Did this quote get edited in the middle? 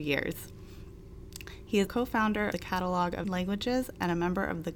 yes; 3 cuts; at 1.9 s, 2.5 s, 3.2 s

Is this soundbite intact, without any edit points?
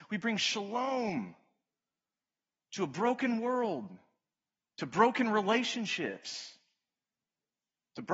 yes; 0 cuts

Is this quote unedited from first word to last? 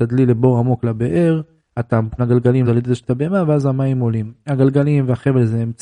no; 3 cuts; at 2.2 s, 2.6 s, 3.0 s

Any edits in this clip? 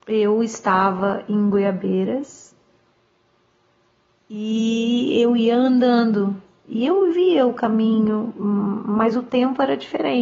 no; 0 cuts

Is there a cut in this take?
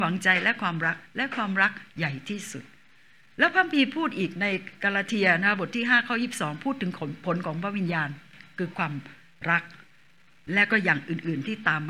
no; 0 cuts

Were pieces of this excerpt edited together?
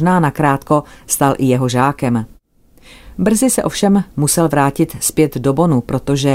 no; 0 cuts

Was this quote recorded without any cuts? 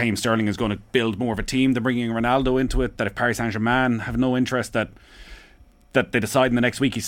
yes; 0 cuts

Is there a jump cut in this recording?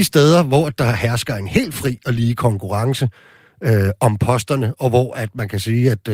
no; 0 cuts

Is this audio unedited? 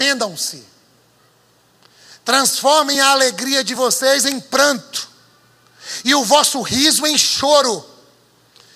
yes; 0 cuts

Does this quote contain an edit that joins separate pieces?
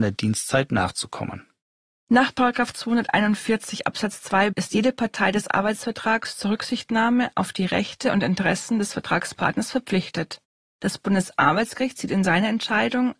yes; 1 cut; at 4.5 s

